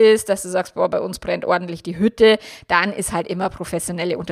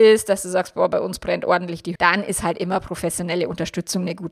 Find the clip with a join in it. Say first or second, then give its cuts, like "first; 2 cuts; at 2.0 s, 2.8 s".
second; 1 cut; at 2.0 s